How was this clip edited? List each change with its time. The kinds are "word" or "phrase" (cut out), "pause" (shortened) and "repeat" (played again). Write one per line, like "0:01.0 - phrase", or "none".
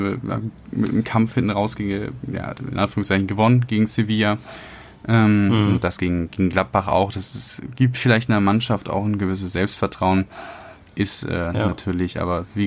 none